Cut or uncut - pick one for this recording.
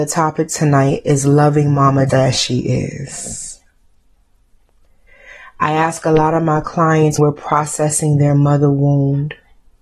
cut